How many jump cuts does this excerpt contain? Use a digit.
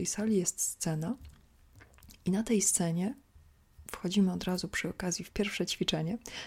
0